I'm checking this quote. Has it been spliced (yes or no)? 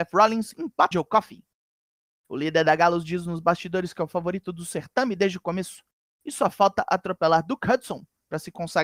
yes